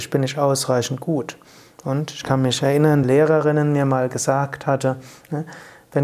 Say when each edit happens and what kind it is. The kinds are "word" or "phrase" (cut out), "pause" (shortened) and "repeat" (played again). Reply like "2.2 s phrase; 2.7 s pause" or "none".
3.0 s phrase